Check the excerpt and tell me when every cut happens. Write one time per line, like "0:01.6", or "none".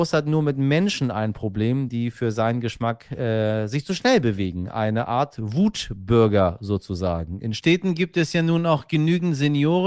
none